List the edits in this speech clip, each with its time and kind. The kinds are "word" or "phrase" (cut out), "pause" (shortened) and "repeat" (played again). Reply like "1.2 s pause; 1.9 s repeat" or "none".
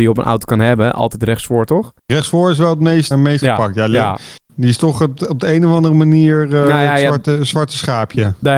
2.0 s pause; 3.1 s word

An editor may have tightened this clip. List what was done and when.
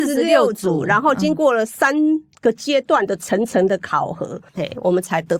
4.5 s pause

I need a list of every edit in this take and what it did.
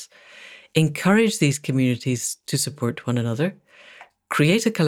none

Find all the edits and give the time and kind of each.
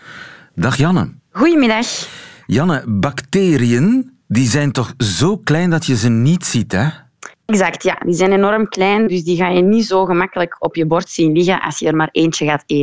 1.2 s pause; 4.2 s pause; 7.3 s pause

